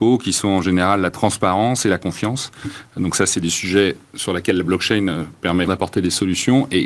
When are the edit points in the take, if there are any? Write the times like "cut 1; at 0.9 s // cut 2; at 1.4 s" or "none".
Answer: cut 1; at 5.7 s